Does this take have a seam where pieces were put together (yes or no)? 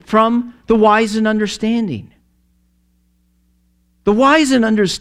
no